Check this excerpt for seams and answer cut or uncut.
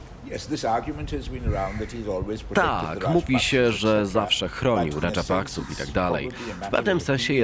cut